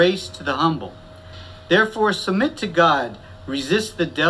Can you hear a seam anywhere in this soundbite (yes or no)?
no